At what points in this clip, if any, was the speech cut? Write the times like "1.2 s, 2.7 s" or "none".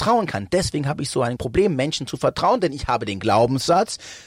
1.4 s